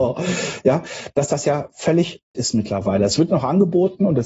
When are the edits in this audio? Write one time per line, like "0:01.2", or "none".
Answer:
0:02.3